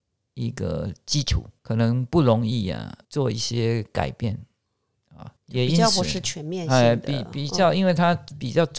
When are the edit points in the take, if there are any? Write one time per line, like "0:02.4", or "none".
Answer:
0:01.6
0:03.0
0:05.4